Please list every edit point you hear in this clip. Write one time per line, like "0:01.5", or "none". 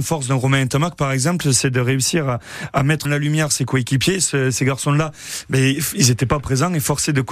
0:03.0